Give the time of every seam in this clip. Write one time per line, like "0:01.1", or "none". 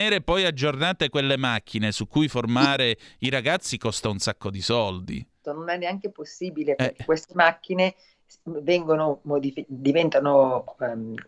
0:05.4
0:09.6